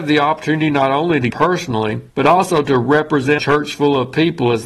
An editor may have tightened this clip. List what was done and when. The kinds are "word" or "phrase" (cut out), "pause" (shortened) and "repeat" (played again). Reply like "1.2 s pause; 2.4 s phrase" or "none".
1.3 s word; 2.1 s pause; 3.4 s word